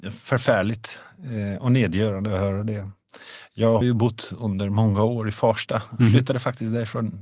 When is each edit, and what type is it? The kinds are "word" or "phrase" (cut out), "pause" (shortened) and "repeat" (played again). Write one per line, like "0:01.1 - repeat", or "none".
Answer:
0:03.8 - word